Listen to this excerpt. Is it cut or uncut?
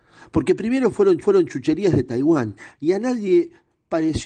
cut